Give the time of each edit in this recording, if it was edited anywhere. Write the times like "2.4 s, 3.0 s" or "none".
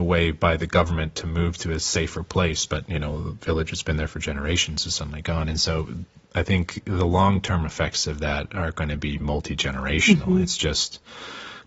none